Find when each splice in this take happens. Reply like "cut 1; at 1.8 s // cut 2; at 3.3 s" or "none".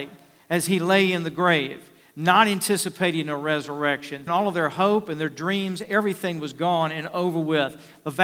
cut 1; at 4.3 s